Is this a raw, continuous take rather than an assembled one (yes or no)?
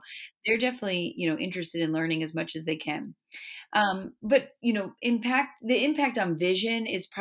yes